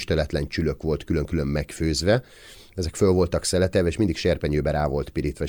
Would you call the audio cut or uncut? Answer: uncut